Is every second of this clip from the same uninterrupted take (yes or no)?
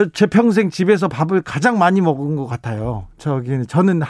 yes